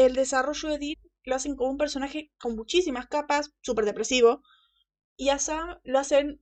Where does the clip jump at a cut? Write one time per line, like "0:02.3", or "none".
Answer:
none

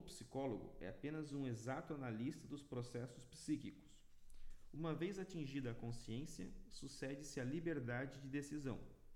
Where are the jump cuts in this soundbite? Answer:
none

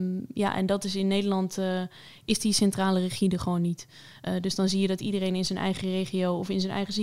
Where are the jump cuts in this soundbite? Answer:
none

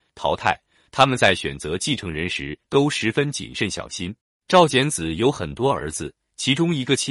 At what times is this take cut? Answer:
0:04.2

